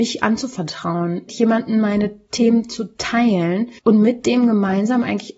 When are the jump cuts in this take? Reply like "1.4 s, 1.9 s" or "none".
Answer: 1.3 s, 3.8 s

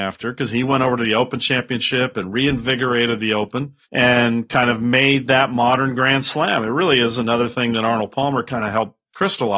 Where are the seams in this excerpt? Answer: 3.8 s

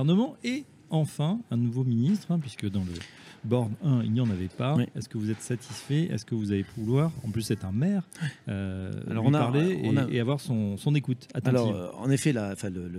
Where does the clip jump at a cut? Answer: none

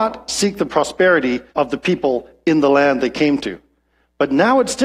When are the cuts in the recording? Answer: 1.5 s

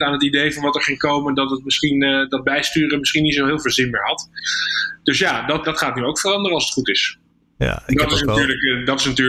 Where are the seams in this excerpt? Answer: 5.6 s

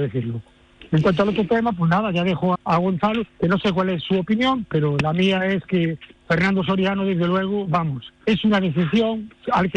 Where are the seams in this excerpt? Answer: 2.5 s, 3.3 s, 6.1 s, 8.2 s

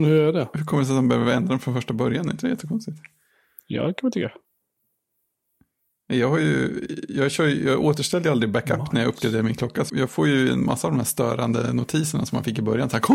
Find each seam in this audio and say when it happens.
9.9 s

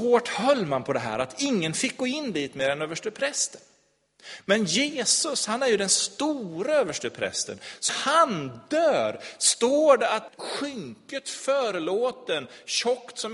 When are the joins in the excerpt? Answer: 7.9 s, 10.3 s

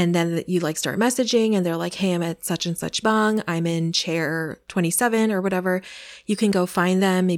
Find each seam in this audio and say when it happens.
3.0 s

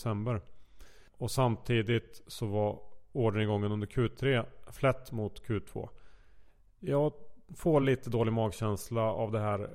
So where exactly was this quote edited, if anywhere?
none

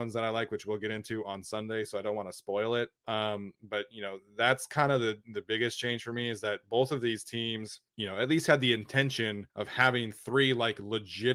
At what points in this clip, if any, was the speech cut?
3.0 s, 7.9 s, 9.5 s

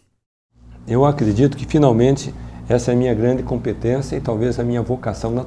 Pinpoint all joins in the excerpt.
none

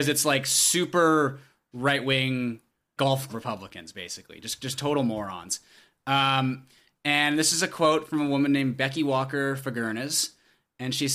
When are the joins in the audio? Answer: 1.7 s, 3.0 s, 3.3 s

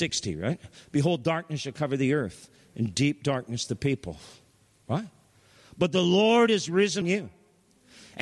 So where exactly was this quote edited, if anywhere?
7.0 s

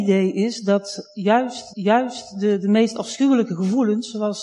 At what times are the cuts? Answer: 1.7 s

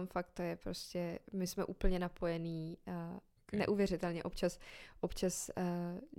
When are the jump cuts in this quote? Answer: 3.4 s

